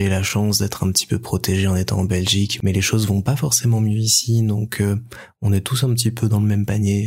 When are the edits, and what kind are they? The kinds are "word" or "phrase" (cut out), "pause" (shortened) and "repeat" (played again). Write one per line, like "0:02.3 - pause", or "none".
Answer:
none